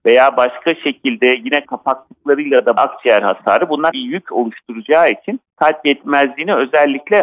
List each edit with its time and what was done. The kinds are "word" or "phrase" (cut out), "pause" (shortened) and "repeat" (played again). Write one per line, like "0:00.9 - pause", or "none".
0:01.6 - word
0:02.8 - phrase
0:03.9 - phrase
0:05.5 - pause

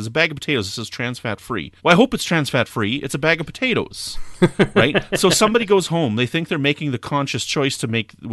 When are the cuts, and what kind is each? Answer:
0:01.8 - pause

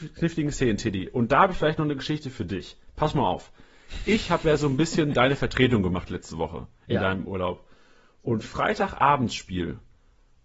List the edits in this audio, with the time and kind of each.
none

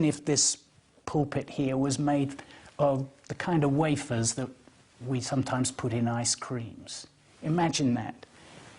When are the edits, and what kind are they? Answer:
none

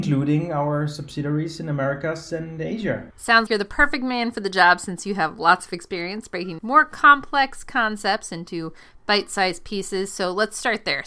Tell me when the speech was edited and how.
0:03.5 - word
0:06.6 - word

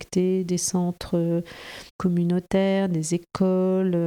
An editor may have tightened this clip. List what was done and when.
0:01.9 - pause

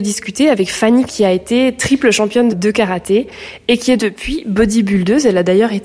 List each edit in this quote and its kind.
0:01.1 - word
0:02.5 - word
0:04.0 - word

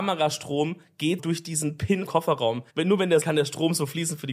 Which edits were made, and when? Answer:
0:01.2 - word
0:02.1 - word
0:02.7 - pause
0:03.2 - phrase

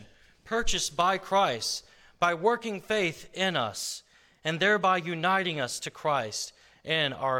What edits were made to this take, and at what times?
none

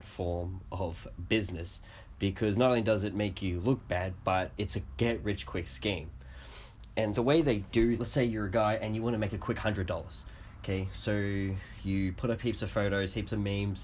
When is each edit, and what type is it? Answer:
0:07.1 - word
0:08.0 - phrase

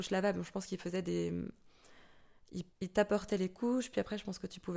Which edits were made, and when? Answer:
0:02.7 - pause

